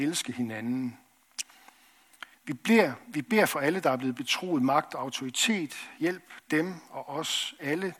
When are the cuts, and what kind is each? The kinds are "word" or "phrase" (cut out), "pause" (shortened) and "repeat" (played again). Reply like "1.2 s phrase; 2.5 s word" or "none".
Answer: 2.3 s pause